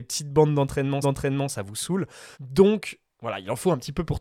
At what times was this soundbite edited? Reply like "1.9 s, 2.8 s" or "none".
1.0 s, 2.3 s